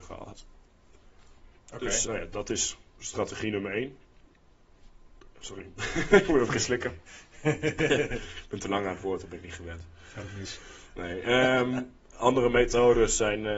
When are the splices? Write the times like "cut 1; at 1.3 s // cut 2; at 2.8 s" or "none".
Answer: cut 1; at 1.6 s // cut 2; at 2.0 s // cut 3; at 2.9 s